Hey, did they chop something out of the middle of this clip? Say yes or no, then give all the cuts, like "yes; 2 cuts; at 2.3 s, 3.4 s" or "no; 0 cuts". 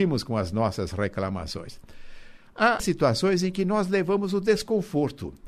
yes; 1 cut; at 2.8 s